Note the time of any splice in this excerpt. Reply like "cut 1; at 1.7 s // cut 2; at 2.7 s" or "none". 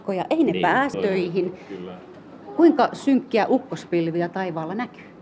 cut 1; at 0.9 s